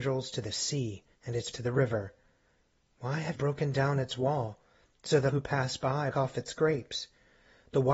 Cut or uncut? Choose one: cut